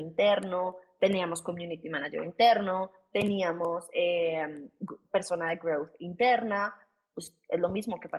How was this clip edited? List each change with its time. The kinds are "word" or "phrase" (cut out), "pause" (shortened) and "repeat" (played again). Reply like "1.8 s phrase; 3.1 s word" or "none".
none